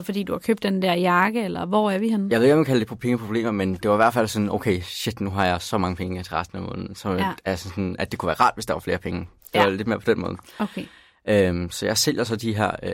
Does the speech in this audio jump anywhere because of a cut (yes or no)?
no